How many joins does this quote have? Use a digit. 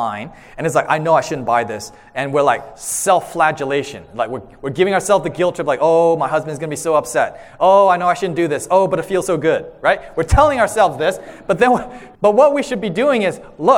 1